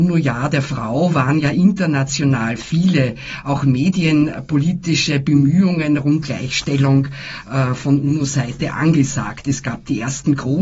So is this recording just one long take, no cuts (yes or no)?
no